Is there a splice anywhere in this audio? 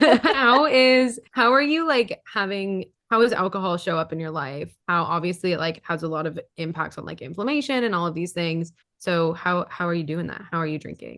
yes; 3 cuts; at 1.3 s, 4.8 s, 8.8 s

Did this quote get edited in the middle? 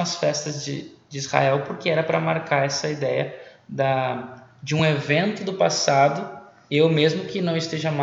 no; 0 cuts

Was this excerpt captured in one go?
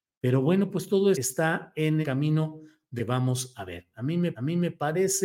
no; 4 cuts; at 1.1 s, 2.0 s, 3.0 s, 4.3 s

